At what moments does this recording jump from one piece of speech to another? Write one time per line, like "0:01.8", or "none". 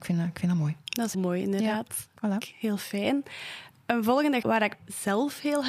0:01.1
0:02.5
0:04.4
0:04.7